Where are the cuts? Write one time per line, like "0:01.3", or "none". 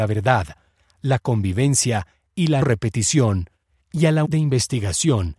0:02.6
0:04.2